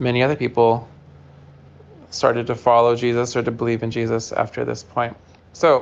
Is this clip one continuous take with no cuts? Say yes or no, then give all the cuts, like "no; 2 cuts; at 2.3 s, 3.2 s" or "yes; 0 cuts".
yes; 0 cuts